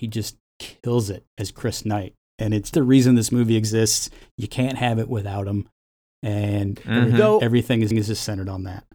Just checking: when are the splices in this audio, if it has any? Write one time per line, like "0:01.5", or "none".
0:01.3
0:02.7
0:07.9